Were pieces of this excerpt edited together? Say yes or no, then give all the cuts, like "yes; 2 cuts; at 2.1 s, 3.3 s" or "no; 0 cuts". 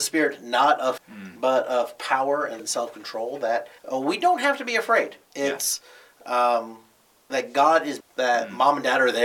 yes; 6 cuts; at 1.0 s, 2.6 s, 3.8 s, 5.2 s, 7.3 s, 8.0 s